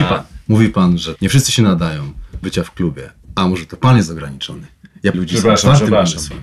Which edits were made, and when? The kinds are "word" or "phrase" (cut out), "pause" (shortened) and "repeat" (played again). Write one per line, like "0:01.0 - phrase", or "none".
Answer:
0:01.2 - word
0:02.4 - word
0:05.1 - word